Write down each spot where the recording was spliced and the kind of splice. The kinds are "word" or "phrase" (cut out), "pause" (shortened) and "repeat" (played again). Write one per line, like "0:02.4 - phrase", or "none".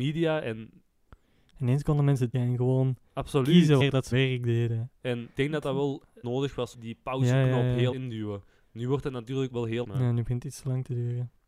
0:02.3 - word
0:03.8 - word
0:04.1 - word
0:05.4 - word
0:06.2 - word
0:06.7 - word
0:07.9 - word
0:09.5 - word
0:09.8 - word